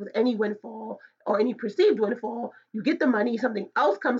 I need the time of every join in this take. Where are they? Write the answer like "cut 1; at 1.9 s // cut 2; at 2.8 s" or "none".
none